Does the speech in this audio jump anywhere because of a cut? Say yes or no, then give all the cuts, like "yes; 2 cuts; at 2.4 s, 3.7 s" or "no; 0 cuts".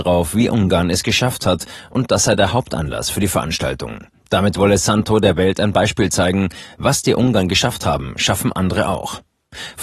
no; 0 cuts